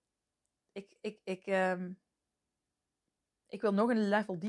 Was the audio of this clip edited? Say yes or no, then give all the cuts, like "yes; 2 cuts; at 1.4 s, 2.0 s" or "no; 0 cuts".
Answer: no; 0 cuts